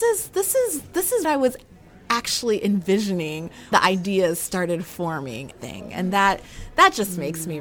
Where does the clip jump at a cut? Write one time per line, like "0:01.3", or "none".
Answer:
0:01.2
0:03.7
0:05.5